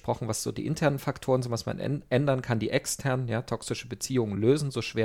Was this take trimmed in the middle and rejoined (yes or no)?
no